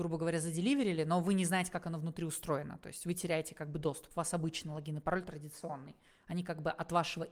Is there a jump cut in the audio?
no; 0 cuts

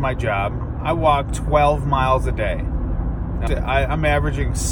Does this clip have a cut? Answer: yes; 2 cuts; at 1.3 s, 3.5 s

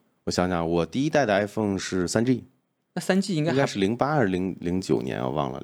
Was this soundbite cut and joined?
no; 0 cuts

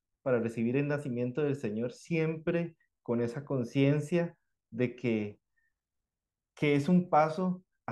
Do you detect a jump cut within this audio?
no; 0 cuts

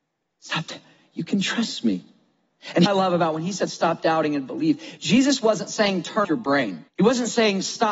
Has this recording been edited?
yes; 3 cuts; at 2.9 s, 6.2 s, 6.9 s

